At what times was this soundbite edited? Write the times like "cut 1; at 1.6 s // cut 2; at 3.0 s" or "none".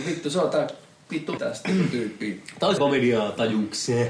cut 1; at 1.4 s // cut 2; at 2.8 s